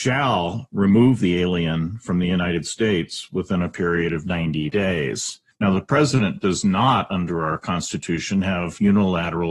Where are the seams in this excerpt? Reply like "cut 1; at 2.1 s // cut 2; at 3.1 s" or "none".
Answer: cut 1; at 5.5 s